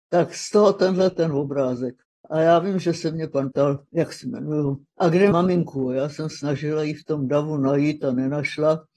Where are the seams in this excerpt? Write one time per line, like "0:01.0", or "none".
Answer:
0:02.0
0:03.5
0:03.9
0:04.9
0:05.3
0:06.3

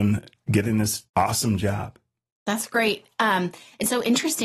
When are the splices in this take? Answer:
0:01.1

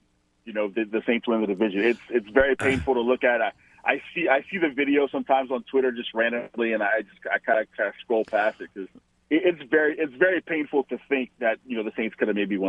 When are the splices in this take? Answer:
none

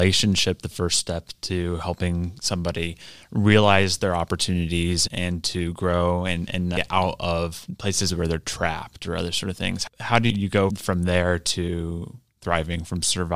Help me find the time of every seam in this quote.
none

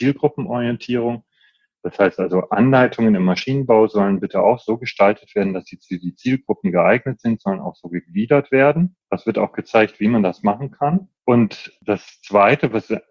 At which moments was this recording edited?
0:09.0
0:11.2

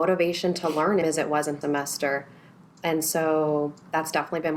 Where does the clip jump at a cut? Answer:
0:01.0
0:01.6

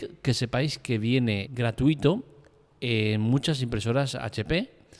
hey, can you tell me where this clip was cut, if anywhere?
0:01.5

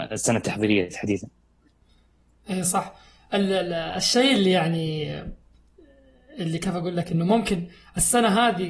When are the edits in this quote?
none

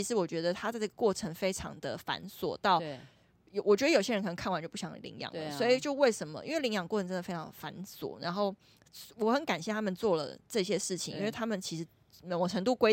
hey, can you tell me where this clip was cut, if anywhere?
none

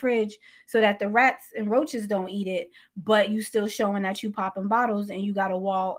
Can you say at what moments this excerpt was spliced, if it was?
none

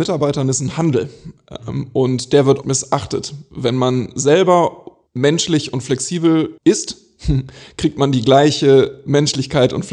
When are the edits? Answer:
0:02.6
0:05.1
0:06.6

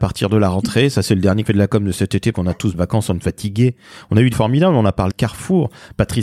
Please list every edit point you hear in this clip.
0:01.5
0:02.3
0:02.7
0:03.2
0:04.3
0:05.1

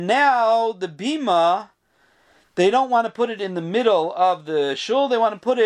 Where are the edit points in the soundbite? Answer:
none

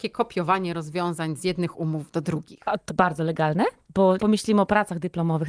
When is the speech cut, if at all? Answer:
0:02.9
0:04.2

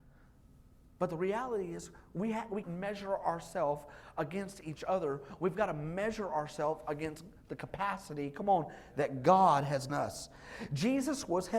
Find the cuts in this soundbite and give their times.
0:02.6
0:09.9

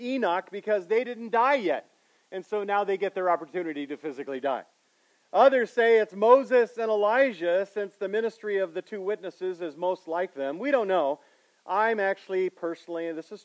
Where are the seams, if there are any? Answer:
none

